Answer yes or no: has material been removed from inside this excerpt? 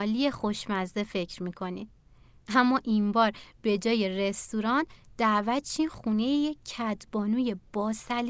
no